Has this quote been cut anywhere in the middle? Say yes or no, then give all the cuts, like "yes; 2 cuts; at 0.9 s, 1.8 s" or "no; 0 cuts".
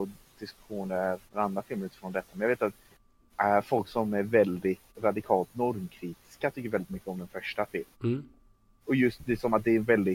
yes; 3 cuts; at 1.3 s, 4.9 s, 7.9 s